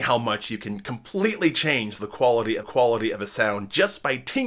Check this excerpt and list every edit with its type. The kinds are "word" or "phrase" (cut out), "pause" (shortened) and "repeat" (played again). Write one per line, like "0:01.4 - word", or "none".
0:02.6 - repeat